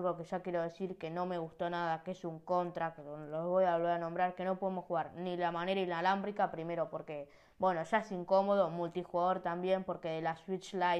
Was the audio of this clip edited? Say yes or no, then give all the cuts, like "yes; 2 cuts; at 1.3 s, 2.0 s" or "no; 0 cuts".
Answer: no; 0 cuts